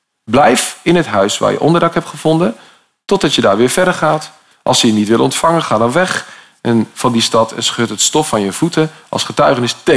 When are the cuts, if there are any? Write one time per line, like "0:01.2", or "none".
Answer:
none

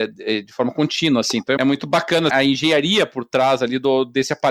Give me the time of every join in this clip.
0:01.6
0:02.3

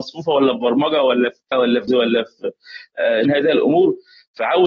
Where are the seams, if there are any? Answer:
0:01.5
0:01.9
0:03.2

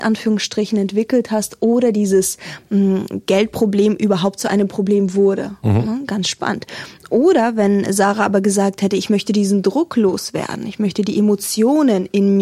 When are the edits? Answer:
none

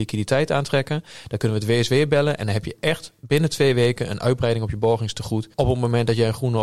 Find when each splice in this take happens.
0:05.5

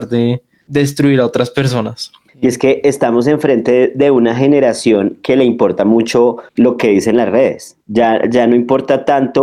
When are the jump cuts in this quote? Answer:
0:02.3
0:06.5
0:07.8

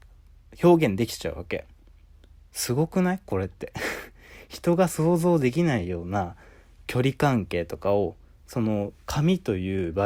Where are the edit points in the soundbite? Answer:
none

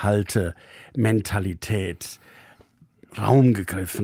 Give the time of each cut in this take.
none

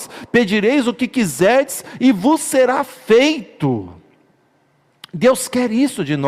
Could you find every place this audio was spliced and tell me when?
none

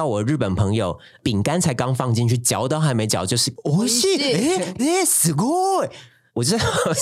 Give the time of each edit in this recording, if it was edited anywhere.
0:04.8

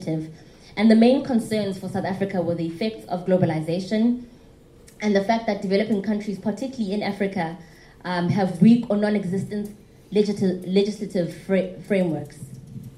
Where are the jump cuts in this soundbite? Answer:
0:11.9

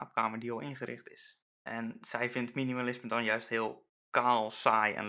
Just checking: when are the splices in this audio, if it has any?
0:01.5
0:04.0

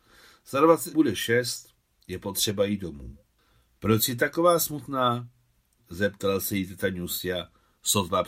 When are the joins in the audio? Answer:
0:00.9

